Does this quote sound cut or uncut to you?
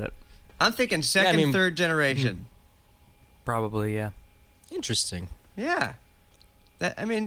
uncut